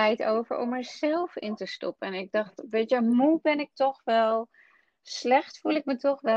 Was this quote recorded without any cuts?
yes; 0 cuts

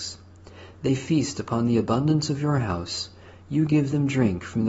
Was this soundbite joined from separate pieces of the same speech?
no; 0 cuts

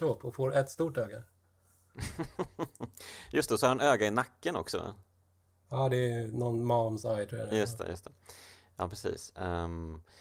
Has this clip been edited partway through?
no; 0 cuts

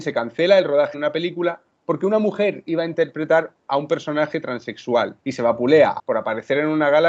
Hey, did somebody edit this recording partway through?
yes; 3 cuts; at 0.9 s, 5.2 s, 6.0 s

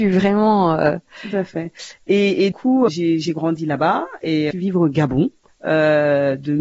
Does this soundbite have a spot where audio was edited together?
yes; 4 cuts; at 2.5 s, 2.9 s, 4.5 s, 5.5 s

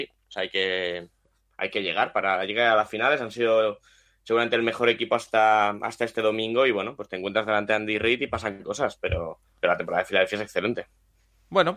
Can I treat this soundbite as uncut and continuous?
no; 1 cut; at 9.5 s

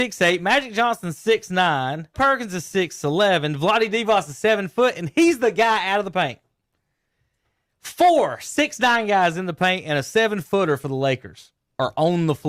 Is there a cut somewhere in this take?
yes; 1 cut; at 2.1 s

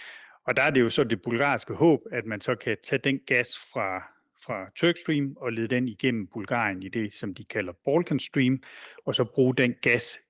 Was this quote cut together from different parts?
no; 0 cuts

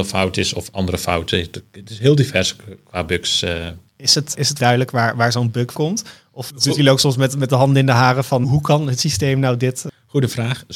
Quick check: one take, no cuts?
no; 4 cuts; at 3.9 s, 4.6 s, 5.7 s, 8.4 s

